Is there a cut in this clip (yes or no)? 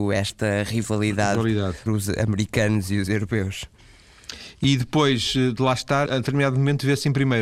yes